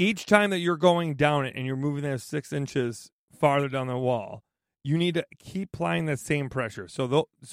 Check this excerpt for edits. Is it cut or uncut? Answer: uncut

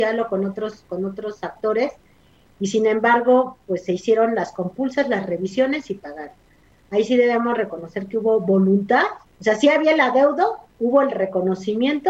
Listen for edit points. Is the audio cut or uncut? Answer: cut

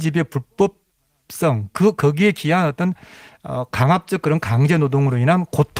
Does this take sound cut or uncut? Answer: uncut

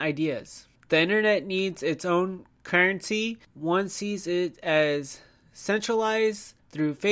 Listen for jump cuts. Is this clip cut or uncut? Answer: uncut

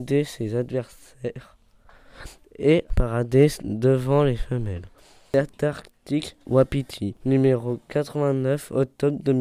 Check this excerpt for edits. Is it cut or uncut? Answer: cut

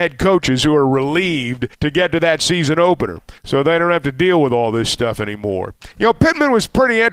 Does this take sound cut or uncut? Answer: cut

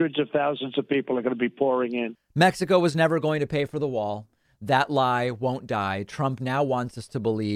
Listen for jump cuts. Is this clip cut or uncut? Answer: uncut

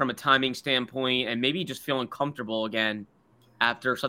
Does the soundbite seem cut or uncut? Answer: uncut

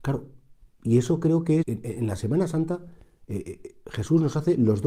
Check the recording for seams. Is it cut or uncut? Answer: cut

